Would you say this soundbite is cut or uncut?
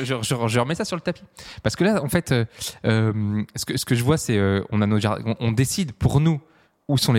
uncut